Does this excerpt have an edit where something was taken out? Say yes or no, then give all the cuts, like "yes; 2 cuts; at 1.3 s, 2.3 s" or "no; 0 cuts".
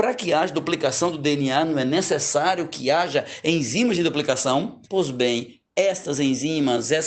yes; 1 cut; at 4.8 s